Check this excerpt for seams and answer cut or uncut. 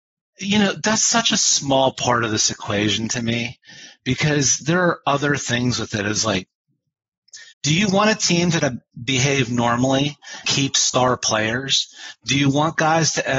cut